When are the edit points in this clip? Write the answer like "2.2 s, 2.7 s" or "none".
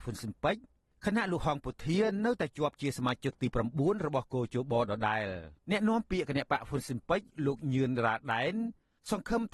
5.6 s